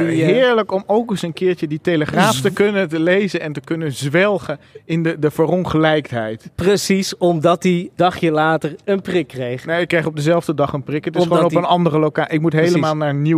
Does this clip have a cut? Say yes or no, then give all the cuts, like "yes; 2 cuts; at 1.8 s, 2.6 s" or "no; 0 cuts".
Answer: yes; 1 cut; at 8.0 s